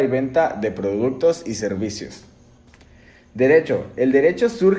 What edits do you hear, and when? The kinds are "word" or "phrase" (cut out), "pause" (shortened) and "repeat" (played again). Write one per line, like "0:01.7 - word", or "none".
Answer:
none